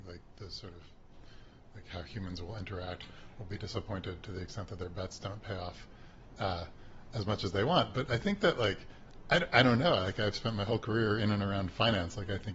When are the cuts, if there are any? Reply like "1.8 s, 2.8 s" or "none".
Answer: none